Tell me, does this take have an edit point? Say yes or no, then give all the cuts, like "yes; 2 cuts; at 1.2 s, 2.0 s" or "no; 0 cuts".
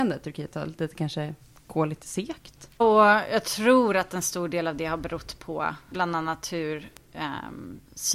yes; 2 cuts; at 2.8 s, 5.9 s